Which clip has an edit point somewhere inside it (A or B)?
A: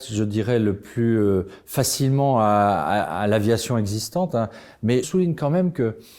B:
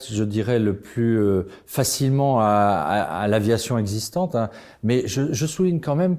A